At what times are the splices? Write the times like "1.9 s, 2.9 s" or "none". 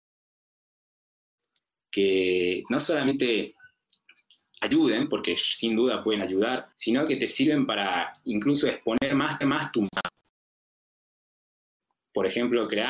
6.7 s, 9.4 s